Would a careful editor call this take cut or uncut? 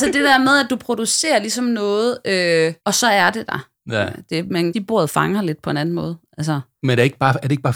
cut